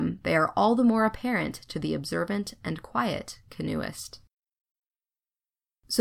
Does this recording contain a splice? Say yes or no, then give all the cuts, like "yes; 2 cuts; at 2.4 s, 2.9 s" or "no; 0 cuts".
no; 0 cuts